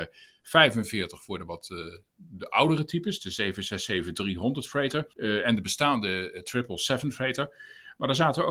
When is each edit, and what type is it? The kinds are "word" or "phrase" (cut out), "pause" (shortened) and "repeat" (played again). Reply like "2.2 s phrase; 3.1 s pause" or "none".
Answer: 5.1 s pause